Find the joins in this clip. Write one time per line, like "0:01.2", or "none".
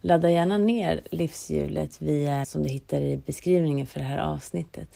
0:02.4

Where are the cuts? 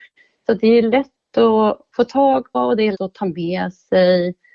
0:02.5
0:02.9

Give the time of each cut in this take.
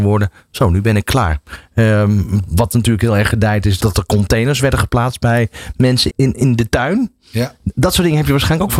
0:03.8
0:06.1

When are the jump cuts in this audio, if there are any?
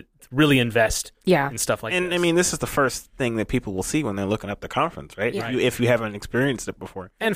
0:01.1

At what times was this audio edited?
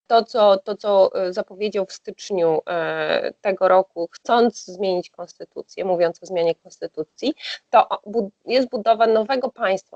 none

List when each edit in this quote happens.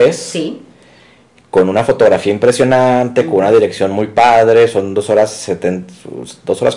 none

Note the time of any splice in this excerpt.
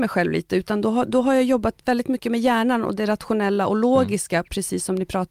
none

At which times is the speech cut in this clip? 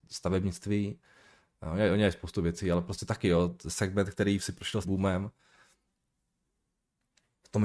0:04.8

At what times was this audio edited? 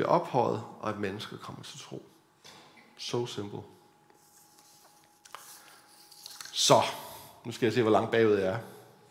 none

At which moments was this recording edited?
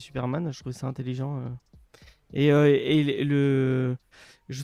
none

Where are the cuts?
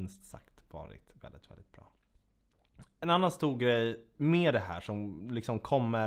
none

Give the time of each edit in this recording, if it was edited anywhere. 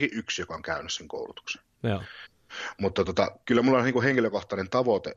none

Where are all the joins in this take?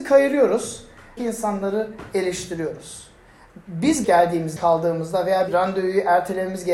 0:01.2
0:04.0
0:04.6
0:05.5

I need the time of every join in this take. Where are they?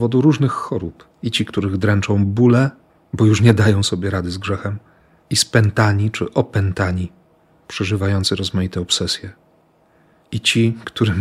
0:01.1

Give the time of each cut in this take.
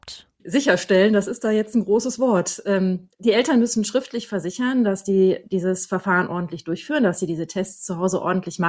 none

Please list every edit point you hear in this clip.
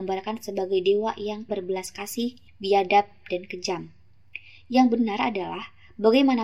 0:01.5
0:02.5

